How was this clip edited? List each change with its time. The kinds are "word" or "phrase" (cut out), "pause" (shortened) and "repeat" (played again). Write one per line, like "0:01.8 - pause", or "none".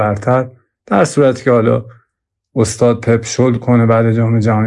none